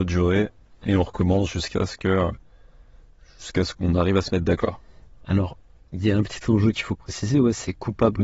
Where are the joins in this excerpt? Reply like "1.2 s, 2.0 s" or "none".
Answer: none